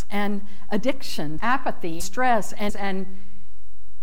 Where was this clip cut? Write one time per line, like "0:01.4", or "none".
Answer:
0:01.4
0:02.0
0:02.7